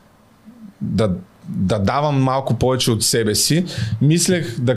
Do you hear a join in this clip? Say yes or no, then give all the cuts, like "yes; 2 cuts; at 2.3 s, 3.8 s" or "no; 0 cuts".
no; 0 cuts